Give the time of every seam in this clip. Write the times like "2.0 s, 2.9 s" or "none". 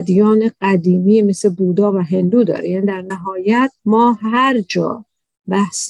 3.8 s